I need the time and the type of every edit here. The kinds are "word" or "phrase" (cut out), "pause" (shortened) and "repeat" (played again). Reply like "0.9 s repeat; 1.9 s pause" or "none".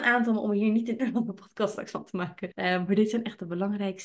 1.0 s word; 2.5 s word